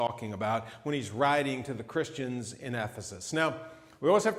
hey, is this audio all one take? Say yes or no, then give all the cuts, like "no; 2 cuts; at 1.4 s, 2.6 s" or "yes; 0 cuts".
yes; 0 cuts